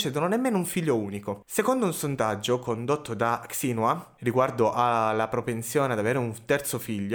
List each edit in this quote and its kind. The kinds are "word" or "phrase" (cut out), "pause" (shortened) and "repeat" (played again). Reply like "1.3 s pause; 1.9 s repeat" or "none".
none